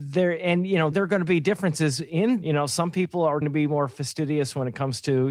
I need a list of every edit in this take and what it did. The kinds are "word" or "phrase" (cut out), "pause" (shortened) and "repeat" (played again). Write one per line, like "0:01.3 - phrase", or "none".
0:00.9 - word
0:02.4 - word
0:03.4 - word